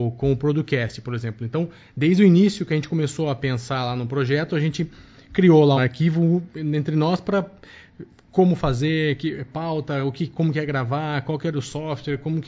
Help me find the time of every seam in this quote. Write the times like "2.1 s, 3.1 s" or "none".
5.8 s